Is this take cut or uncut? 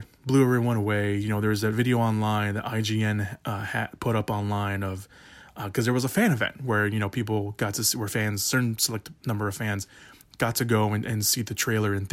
uncut